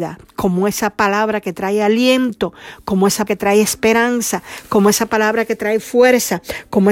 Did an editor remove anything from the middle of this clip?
yes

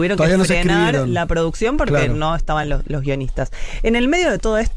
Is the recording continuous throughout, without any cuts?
yes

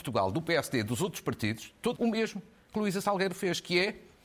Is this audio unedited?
no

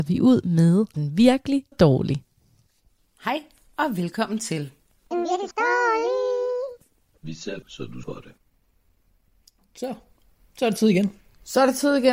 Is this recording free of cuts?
no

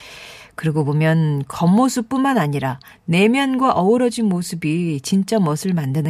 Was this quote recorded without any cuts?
yes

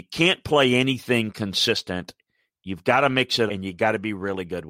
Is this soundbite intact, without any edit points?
no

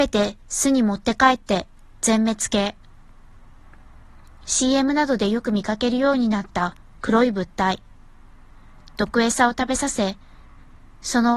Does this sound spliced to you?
no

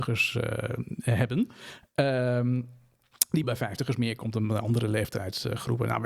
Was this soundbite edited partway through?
yes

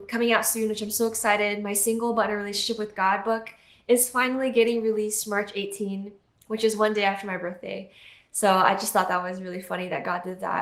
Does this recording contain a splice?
no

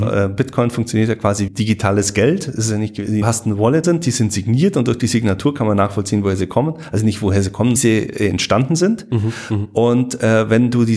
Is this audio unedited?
no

